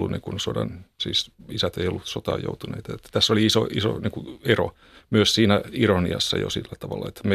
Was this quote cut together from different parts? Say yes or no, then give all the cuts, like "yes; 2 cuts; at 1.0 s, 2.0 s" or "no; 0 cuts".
yes; 1 cut; at 0.9 s